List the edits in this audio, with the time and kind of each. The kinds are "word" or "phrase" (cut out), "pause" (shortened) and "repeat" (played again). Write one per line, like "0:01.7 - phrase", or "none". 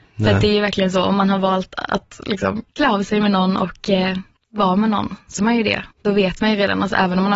0:02.7 - pause
0:04.4 - pause
0:05.4 - word
0:05.9 - pause